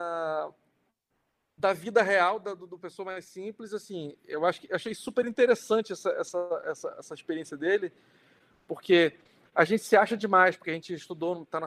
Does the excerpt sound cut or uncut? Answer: uncut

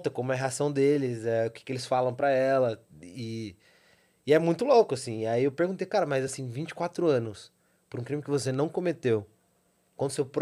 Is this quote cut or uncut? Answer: uncut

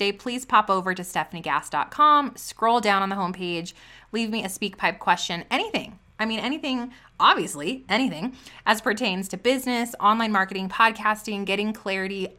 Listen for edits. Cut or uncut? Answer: uncut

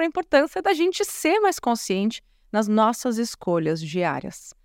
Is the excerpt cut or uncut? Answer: uncut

